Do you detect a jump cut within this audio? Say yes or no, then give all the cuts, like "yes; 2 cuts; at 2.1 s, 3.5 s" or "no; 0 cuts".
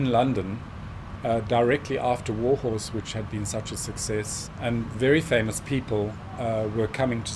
no; 0 cuts